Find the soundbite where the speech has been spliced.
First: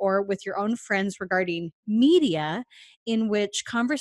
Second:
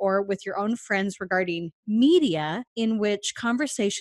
second; 1 cut; at 2.7 s

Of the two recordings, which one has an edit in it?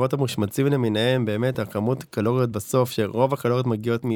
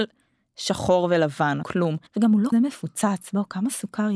second; 3 cuts; at 1.6 s, 2.1 s, 2.5 s

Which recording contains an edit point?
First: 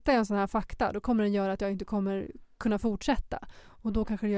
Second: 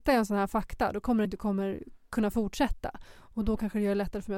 second; 1 cut; at 1.2 s

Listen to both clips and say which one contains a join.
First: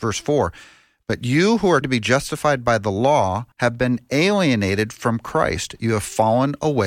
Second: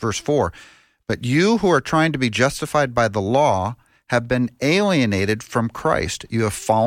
first; 2 cuts; at 1.8 s, 3.5 s

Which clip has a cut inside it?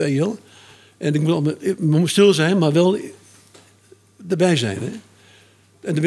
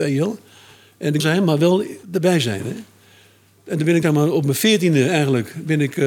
second; 3 cuts; at 1.2 s, 2.0 s, 4.0 s

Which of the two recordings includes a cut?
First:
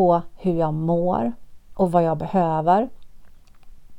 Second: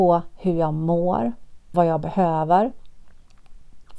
second; 1 cut; at 1.7 s

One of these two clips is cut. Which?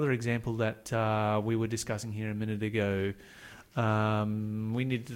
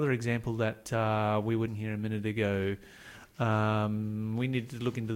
second; 1 cut; at 1.7 s

